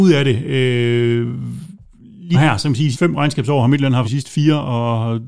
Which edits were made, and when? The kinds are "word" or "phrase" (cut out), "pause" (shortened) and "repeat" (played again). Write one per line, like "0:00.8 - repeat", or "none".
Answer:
0:02.3 - word
0:02.9 - word
0:04.0 - word